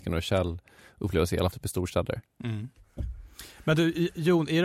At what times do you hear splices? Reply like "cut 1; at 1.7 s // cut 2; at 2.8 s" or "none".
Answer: cut 1; at 1.5 s